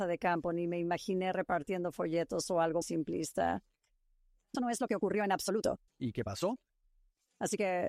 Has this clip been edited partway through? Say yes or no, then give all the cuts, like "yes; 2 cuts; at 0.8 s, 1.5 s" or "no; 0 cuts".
yes; 3 cuts; at 2.8 s, 4.5 s, 5.9 s